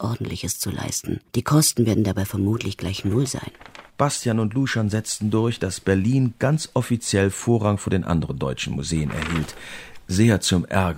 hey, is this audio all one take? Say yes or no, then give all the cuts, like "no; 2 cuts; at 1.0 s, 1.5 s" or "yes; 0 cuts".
no; 2 cuts; at 1.3 s, 3.9 s